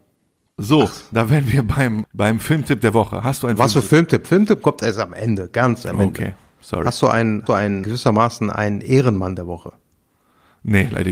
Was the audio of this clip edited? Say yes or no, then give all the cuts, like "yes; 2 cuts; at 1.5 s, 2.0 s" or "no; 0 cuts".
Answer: yes; 3 cuts; at 2.0 s, 7.5 s, 7.8 s